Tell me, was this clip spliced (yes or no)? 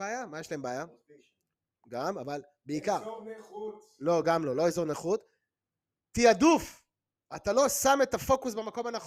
no